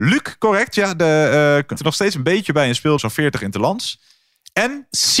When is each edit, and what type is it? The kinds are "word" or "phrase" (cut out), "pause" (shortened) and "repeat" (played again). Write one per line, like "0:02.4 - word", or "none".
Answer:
0:01.8 - word
0:03.0 - word